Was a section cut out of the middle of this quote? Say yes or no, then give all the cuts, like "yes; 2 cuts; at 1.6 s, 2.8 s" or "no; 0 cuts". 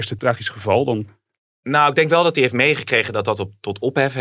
no; 0 cuts